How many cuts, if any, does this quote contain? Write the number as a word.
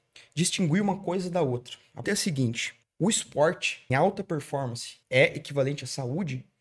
four